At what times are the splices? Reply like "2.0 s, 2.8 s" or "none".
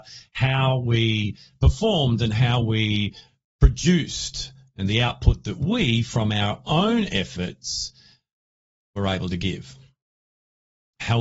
none